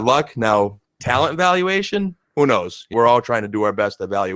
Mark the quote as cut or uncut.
cut